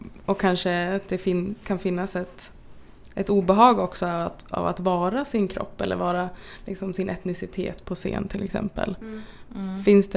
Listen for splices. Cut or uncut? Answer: uncut